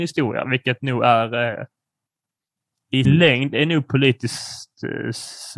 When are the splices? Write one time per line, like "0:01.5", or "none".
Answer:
0:03.0